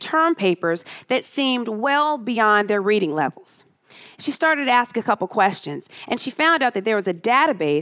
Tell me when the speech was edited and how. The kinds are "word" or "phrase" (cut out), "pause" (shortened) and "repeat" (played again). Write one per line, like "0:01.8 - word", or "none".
none